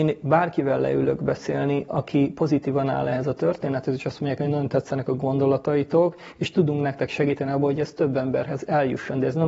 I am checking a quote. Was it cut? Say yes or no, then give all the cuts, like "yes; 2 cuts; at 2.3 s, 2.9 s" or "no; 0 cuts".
no; 0 cuts